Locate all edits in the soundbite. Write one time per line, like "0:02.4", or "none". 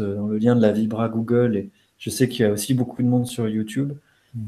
none